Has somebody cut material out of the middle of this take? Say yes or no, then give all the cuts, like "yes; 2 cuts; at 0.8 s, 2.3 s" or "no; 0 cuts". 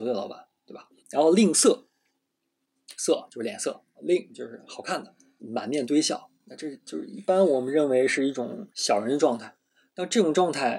yes; 4 cuts; at 1.0 s, 4.0 s, 5.4 s, 8.7 s